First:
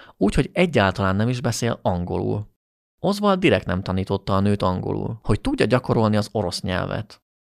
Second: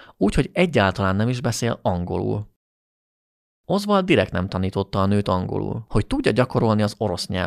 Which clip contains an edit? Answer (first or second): first